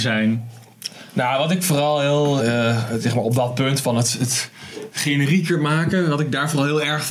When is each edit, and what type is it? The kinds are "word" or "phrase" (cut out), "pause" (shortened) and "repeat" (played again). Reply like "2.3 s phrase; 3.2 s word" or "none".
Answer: 2.4 s word